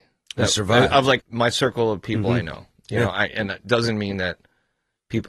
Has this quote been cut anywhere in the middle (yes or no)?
yes